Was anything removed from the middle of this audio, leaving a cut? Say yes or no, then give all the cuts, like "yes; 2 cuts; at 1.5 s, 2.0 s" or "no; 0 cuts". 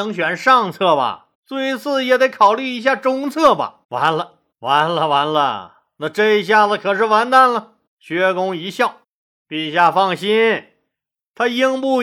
yes; 5 cuts; at 1.3 s, 3.8 s, 4.5 s, 7.9 s, 9.0 s